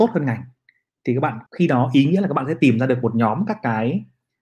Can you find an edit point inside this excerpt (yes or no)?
yes